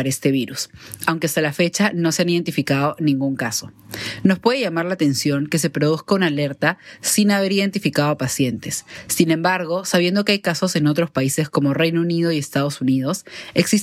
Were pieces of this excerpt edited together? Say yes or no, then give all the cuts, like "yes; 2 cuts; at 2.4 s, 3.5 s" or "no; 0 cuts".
no; 0 cuts